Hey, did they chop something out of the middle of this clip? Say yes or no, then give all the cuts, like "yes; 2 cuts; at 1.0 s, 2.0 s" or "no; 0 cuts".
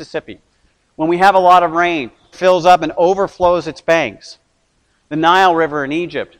yes; 1 cut; at 2.3 s